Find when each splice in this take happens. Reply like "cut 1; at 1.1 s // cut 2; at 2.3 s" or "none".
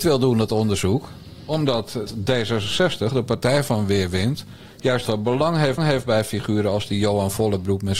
cut 1; at 2.1 s // cut 2; at 5.1 s // cut 3; at 5.8 s